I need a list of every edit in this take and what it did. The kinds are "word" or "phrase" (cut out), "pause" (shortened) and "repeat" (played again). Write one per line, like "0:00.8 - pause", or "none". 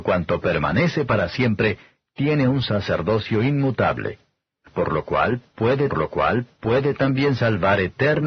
0:05.9 - repeat